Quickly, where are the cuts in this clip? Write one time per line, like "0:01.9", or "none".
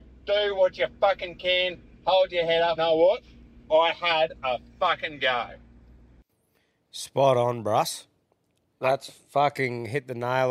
0:02.8